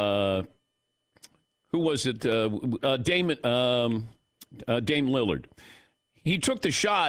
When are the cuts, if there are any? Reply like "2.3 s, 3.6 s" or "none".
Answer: none